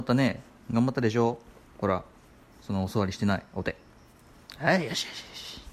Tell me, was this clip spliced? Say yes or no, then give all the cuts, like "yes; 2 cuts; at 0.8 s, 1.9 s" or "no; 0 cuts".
no; 0 cuts